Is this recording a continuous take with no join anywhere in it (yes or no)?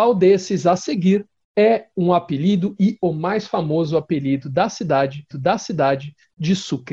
no